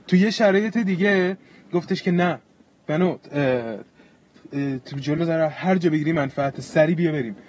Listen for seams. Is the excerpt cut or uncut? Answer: uncut